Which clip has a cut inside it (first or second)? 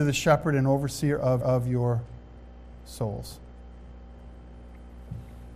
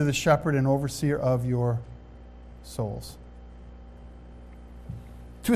first